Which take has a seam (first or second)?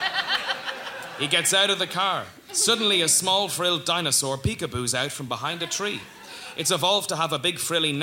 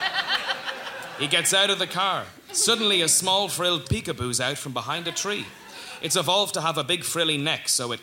second